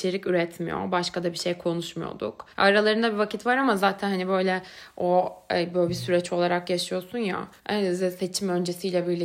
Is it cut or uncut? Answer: cut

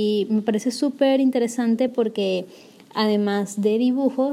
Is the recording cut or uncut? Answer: uncut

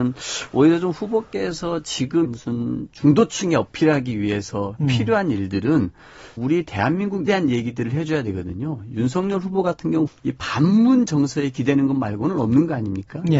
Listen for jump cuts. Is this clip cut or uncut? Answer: cut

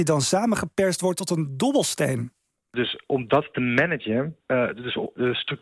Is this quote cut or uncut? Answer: uncut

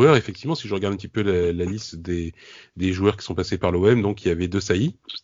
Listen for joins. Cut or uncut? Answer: uncut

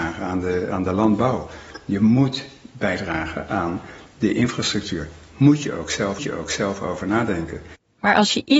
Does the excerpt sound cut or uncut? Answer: cut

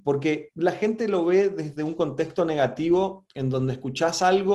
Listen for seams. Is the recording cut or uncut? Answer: uncut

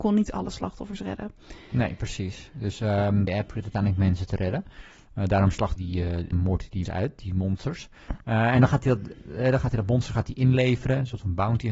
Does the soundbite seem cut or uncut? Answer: cut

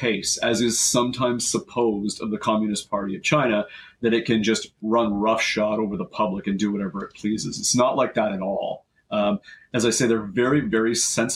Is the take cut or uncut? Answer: uncut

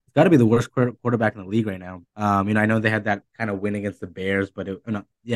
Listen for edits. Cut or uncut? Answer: cut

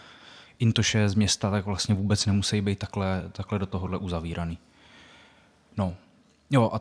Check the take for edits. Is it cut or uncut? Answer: uncut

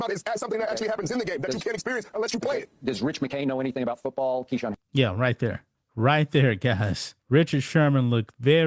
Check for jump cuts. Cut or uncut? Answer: cut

